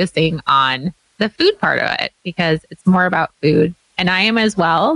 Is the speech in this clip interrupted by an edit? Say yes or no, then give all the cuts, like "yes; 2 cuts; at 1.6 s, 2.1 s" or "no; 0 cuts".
no; 0 cuts